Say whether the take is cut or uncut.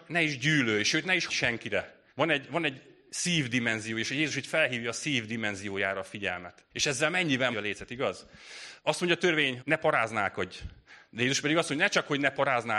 cut